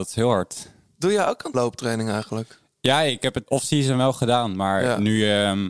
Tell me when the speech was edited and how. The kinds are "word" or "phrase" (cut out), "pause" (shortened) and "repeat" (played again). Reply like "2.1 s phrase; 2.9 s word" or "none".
1.5 s word; 3.5 s word